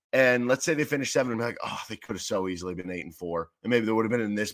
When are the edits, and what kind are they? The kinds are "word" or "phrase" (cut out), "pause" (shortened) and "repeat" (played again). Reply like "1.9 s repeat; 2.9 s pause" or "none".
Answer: 1.3 s phrase